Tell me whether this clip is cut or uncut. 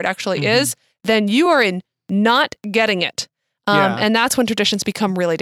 uncut